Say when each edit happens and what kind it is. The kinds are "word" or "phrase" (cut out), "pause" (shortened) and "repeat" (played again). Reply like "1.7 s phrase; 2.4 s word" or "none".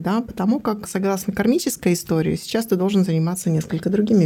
none